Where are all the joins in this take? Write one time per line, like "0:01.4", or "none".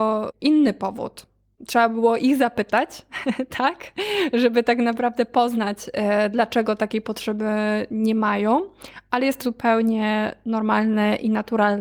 0:09.4